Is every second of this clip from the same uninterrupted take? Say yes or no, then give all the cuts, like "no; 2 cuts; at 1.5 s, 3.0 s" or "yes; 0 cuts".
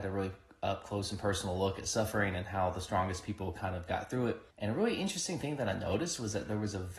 no; 1 cut; at 4.5 s